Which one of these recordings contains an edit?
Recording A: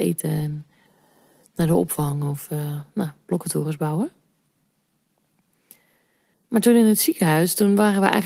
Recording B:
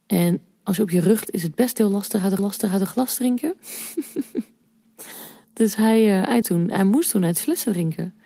B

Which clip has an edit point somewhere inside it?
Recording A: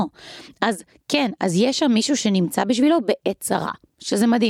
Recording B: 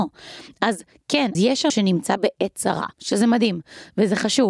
B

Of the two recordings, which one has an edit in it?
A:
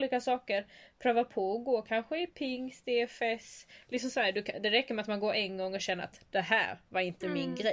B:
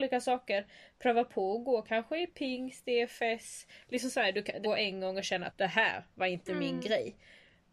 B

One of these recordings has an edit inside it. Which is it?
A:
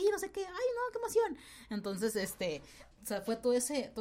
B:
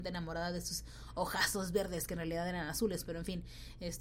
A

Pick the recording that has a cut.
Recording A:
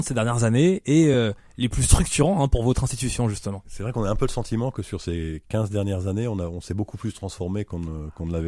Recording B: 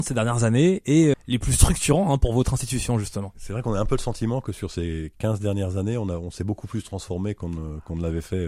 B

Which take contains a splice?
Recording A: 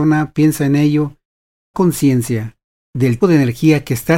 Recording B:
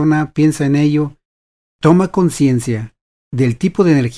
A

